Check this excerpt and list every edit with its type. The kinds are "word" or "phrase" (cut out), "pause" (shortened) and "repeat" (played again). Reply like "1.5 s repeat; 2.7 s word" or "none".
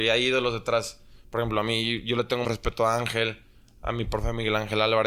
2.4 s word